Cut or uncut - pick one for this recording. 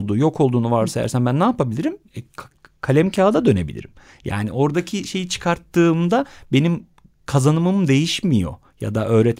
uncut